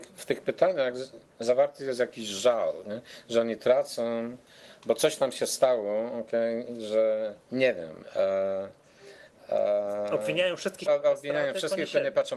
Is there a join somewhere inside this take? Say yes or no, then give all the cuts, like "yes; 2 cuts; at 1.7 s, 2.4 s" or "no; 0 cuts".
yes; 2 cuts; at 7.4 s, 10.9 s